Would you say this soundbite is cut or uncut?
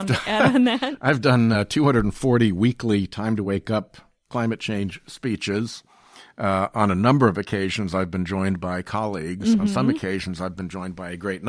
uncut